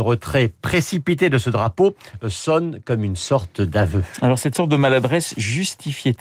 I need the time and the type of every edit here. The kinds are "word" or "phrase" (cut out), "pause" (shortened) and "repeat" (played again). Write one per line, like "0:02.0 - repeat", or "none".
none